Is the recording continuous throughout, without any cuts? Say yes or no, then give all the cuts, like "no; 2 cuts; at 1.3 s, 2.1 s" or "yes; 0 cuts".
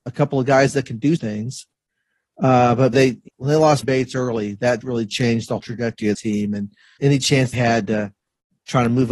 no; 9 cuts; at 1.2 s, 2.9 s, 3.3 s, 3.8 s, 4.8 s, 5.6 s, 6.1 s, 7.0 s, 7.5 s